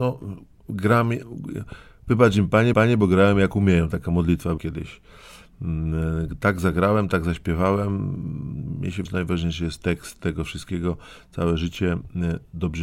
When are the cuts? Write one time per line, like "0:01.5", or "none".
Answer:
0:02.7
0:04.6
0:09.1